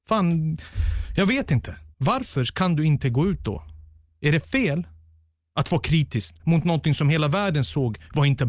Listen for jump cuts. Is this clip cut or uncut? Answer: cut